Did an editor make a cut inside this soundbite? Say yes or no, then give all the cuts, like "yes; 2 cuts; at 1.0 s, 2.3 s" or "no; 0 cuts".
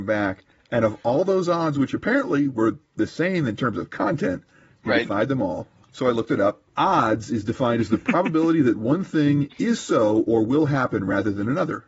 no; 0 cuts